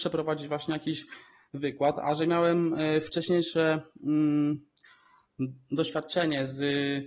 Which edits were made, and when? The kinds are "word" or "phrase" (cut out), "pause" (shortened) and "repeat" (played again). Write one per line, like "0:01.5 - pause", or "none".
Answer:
none